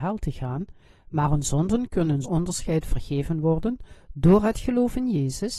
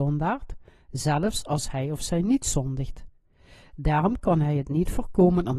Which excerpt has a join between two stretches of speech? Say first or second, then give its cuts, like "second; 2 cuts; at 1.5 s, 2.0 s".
first; 1 cut; at 2.2 s